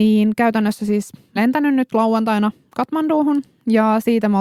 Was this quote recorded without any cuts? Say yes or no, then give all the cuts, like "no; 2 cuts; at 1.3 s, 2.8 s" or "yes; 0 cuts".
no; 1 cut; at 1.4 s